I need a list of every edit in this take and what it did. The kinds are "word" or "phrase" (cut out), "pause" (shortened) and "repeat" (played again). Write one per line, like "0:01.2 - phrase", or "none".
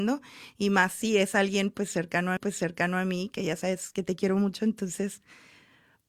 0:02.4 - repeat